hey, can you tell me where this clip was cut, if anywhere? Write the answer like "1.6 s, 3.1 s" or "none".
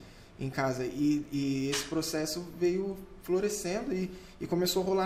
none